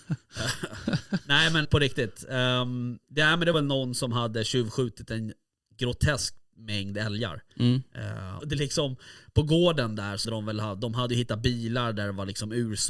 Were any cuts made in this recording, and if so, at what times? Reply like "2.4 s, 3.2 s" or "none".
1.6 s, 3.5 s, 8.4 s, 10.2 s